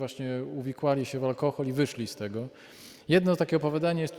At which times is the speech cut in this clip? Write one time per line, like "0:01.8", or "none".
none